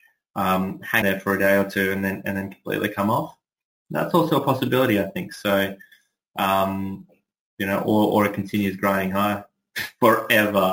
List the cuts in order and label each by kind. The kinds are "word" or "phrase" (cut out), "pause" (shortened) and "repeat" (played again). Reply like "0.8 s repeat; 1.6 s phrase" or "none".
1.0 s word